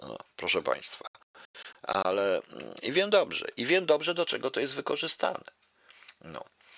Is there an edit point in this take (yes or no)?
no